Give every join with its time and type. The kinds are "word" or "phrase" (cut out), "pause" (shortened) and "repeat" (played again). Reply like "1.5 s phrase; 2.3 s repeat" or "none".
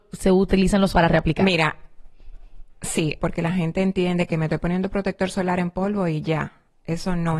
0.9 s word; 3.2 s phrase